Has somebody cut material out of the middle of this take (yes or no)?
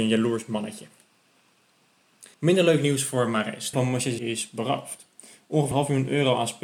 yes